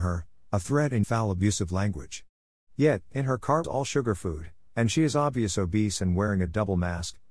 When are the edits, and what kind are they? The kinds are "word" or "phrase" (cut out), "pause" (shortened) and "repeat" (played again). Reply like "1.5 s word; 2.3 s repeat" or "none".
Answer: 1.0 s word; 3.6 s word